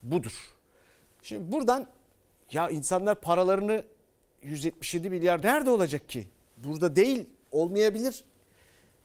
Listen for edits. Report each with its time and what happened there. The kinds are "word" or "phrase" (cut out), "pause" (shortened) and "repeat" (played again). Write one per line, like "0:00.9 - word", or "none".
0:05.4 - word

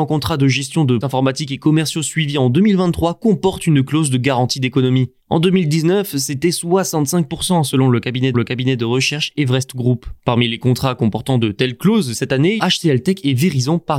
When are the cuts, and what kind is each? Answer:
0:01.0 - word
0:05.2 - pause
0:08.3 - repeat
0:10.2 - pause
0:12.1 - word
0:12.6 - phrase

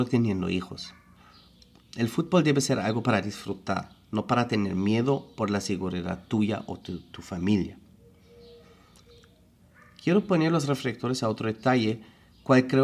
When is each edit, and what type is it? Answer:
none

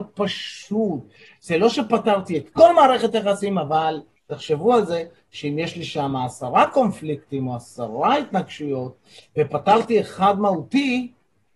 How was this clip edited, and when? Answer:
none

